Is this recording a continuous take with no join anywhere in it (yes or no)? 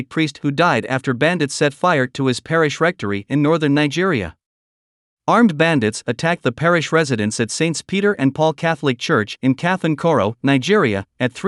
yes